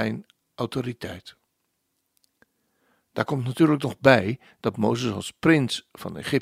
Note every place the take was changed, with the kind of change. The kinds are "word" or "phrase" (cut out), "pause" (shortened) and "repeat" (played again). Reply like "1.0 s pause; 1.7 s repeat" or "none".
none

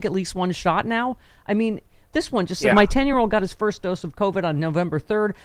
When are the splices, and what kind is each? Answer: none

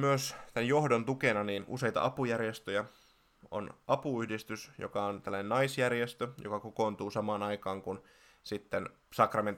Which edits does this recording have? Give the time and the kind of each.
none

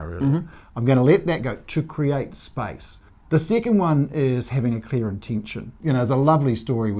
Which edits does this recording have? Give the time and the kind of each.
3.1 s pause

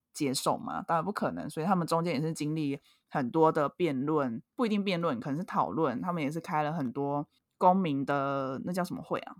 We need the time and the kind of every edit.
4.5 s pause; 7.4 s pause

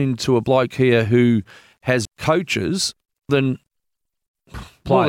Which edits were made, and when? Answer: 2.0 s word; 3.3 s word

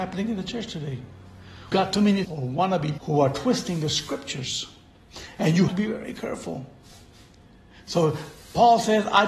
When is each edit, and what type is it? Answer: 1.7 s word; 2.2 s word; 3.0 s word; 5.7 s word

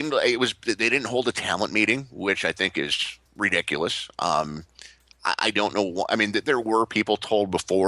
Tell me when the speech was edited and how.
3.3 s pause

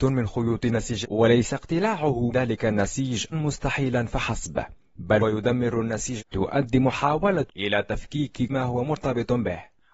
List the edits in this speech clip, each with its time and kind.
1.0 s word; 2.3 s word; 3.3 s word; 5.2 s word; 6.2 s word; 7.5 s word; 8.5 s word

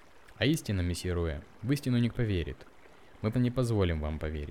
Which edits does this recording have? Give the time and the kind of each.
2.1 s word; 3.3 s word

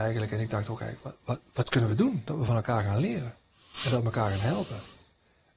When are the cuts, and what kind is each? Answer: none

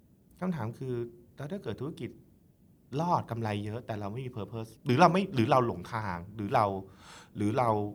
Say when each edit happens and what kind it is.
4.8 s pause

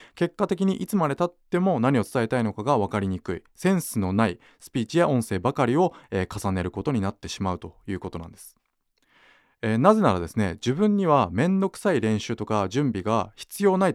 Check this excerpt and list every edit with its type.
none

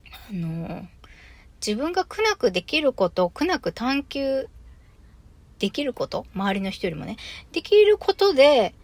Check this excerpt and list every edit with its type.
none

